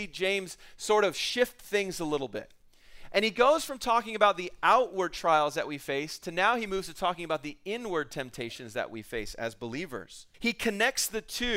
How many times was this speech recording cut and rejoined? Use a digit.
1